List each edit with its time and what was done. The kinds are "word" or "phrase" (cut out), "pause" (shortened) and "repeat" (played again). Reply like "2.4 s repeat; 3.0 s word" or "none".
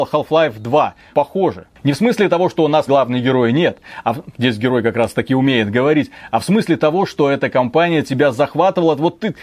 1.1 s word; 2.9 s word